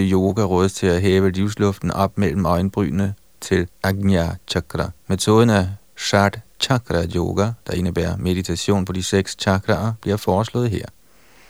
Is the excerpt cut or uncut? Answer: cut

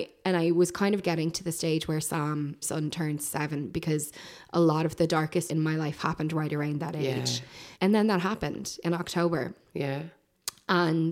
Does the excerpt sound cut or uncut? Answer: cut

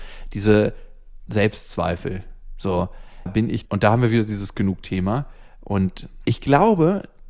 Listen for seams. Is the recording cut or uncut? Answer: cut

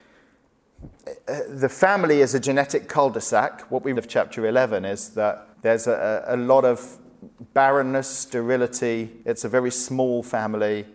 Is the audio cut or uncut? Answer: cut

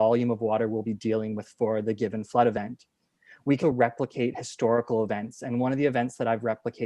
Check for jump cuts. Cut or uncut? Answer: cut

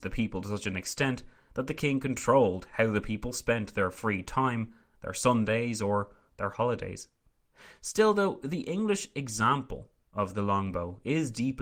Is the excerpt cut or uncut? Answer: uncut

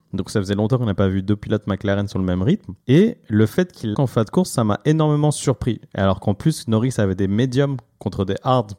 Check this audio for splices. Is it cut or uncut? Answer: cut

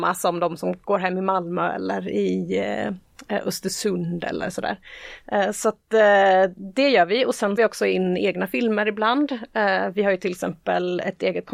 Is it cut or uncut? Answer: cut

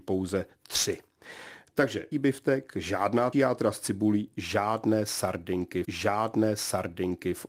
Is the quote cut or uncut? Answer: cut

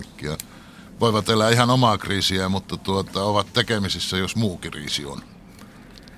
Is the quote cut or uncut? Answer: uncut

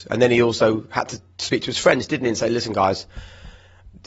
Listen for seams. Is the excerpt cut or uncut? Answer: uncut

